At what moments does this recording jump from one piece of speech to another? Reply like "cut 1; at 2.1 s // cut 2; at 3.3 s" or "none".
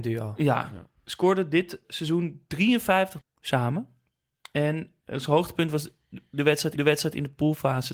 cut 1; at 1.8 s // cut 2; at 3.2 s // cut 3; at 6.8 s